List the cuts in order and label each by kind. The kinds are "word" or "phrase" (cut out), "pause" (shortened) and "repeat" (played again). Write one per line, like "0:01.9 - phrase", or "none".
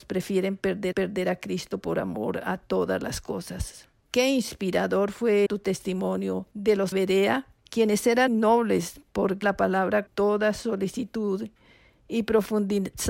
0:00.9 - repeat
0:04.0 - pause
0:05.5 - word
0:06.5 - pause
0:06.9 - phrase
0:07.6 - pause
0:08.3 - word
0:09.4 - word
0:10.1 - word